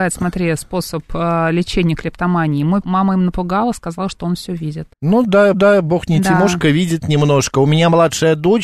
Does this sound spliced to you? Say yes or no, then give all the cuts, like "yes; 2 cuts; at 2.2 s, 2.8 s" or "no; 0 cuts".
yes; 3 cuts; at 2.8 s, 4.9 s, 5.5 s